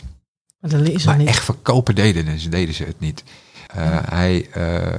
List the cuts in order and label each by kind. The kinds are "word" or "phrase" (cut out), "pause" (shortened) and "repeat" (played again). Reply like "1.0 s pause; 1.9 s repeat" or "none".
3.7 s pause